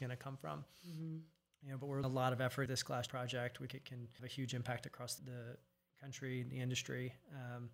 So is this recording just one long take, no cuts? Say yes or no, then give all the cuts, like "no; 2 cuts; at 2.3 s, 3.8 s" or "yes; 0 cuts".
no; 6 cuts; at 2.0 s, 2.7 s, 3.1 s, 3.7 s, 4.2 s, 5.2 s